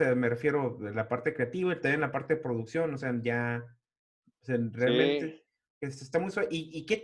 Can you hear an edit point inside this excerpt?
no; 0 cuts

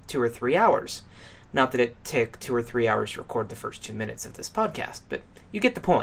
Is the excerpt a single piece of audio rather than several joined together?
yes; 0 cuts

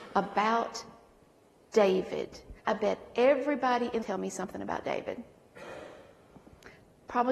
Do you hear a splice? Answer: yes; 2 cuts; at 2.6 s, 4.0 s

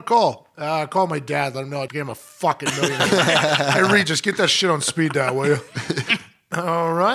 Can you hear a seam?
yes; 1 cut; at 1.9 s

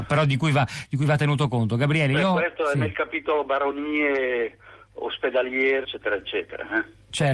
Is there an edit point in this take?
yes; 1 cut; at 5.8 s

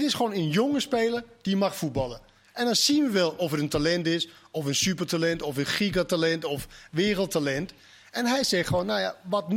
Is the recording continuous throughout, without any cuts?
yes; 0 cuts

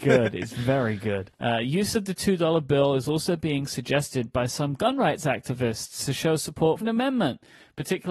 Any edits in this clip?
yes; 1 cut; at 6.8 s

